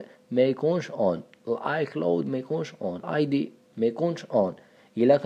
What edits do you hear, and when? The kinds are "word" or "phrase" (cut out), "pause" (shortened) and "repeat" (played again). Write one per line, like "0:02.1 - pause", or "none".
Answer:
0:03.0 - word
0:03.7 - word